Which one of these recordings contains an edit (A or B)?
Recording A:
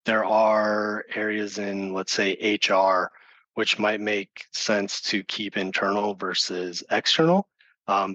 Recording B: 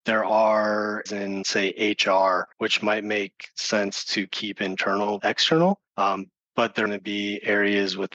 B